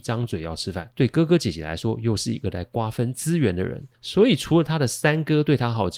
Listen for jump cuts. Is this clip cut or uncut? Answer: cut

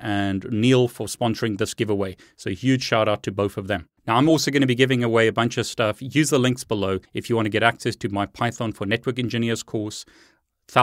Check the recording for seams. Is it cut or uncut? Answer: cut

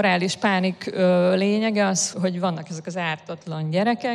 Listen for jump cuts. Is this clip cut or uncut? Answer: cut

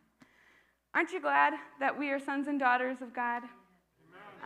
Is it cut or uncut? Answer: uncut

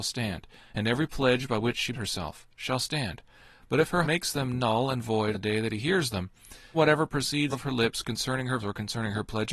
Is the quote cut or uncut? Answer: cut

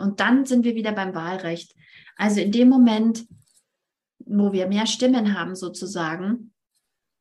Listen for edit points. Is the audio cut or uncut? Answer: uncut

